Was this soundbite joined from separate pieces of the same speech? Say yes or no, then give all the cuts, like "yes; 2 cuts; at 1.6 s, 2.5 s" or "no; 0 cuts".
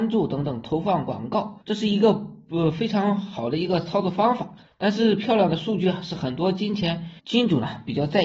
yes; 3 cuts; at 1.6 s, 4.7 s, 7.2 s